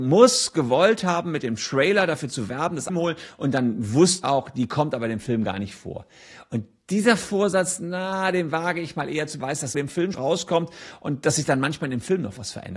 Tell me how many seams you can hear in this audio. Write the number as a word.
five